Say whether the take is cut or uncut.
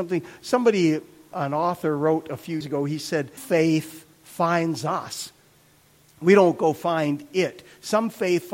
cut